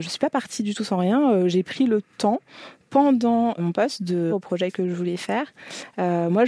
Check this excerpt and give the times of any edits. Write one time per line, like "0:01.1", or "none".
0:03.6
0:04.3